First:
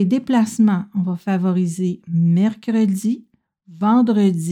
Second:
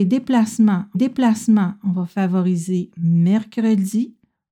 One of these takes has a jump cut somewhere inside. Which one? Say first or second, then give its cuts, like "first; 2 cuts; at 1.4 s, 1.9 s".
second; 1 cut; at 0.9 s